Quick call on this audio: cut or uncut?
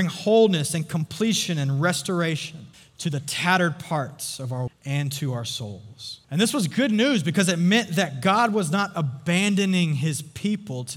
cut